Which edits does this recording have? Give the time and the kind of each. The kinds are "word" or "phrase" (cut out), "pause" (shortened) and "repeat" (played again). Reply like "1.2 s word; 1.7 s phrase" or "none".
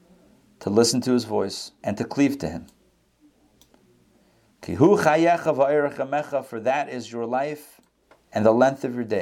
1.8 s pause